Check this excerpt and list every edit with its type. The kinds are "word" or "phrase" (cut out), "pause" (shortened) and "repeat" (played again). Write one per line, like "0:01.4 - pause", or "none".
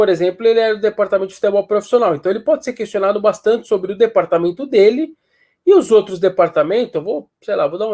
none